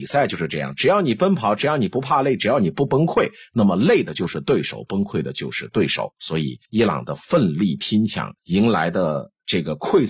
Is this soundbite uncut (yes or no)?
no